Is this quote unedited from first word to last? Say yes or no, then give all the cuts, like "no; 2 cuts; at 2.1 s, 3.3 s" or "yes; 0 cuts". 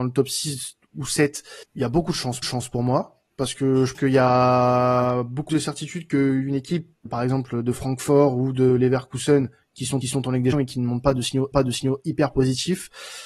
no; 9 cuts; at 1.6 s, 2.4 s, 3.3 s, 3.9 s, 5.5 s, 7.1 s, 10.0 s, 10.5 s, 11.5 s